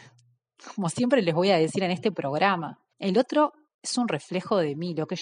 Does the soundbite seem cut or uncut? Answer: cut